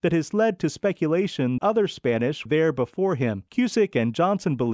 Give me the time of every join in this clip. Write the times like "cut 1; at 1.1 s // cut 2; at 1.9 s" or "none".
cut 1; at 1.6 s // cut 2; at 2.5 s // cut 3; at 3.5 s